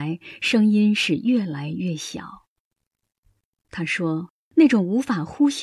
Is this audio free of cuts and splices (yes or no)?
no